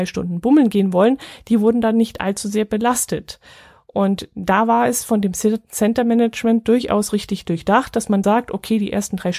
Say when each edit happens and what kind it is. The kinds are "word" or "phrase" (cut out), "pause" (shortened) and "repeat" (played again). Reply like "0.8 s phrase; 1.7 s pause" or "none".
8.2 s word